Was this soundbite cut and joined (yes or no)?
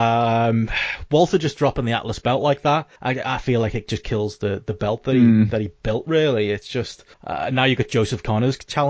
yes